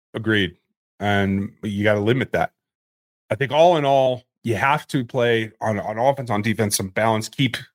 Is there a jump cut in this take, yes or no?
no